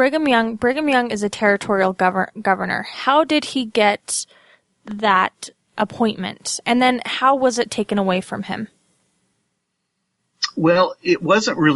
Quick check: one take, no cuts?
yes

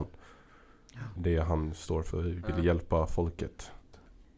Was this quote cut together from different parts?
yes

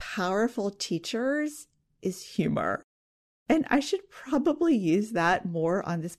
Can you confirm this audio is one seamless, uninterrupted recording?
yes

